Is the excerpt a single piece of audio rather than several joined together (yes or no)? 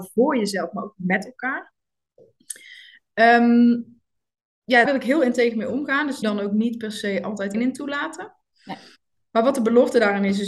no